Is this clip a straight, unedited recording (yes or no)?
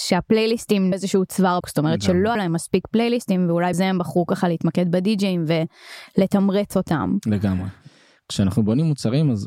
no